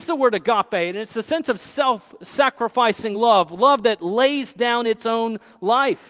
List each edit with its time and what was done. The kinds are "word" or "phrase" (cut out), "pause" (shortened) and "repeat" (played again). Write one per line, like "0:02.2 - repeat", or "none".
none

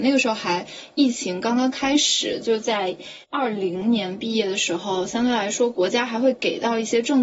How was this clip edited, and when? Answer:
0:03.2 - pause

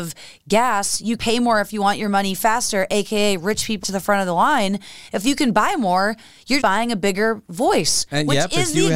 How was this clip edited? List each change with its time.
0:01.2 - word
0:03.8 - word
0:06.6 - word

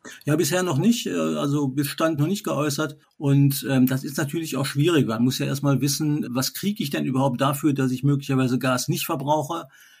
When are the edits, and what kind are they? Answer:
0:02.2 - phrase
0:03.0 - pause
0:06.3 - word

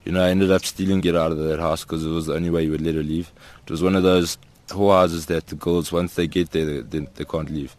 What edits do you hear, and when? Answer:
0:01.0 - phrase
0:05.5 - word

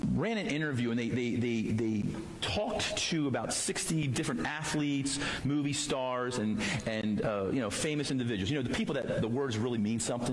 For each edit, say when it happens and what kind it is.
none

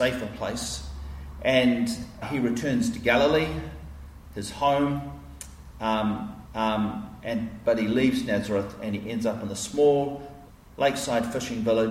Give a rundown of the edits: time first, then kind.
0:02.2 - word
0:06.5 - repeat
0:10.5 - pause

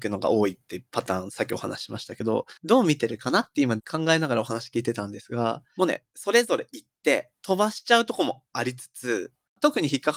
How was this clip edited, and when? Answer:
0:02.6 - pause

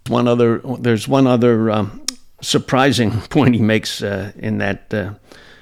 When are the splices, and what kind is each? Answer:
none

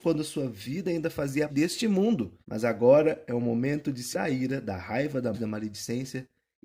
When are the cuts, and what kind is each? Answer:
0:01.5 - word
0:02.4 - pause
0:04.1 - word
0:05.3 - word

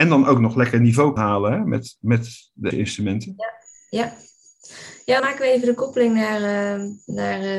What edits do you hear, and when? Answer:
0:01.2 - word
0:02.7 - word
0:05.2 - phrase

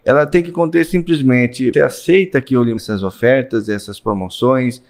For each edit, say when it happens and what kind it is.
0:01.7 - word
0:02.8 - word

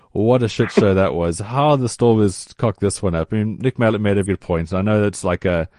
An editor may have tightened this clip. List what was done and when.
0:04.3 - word

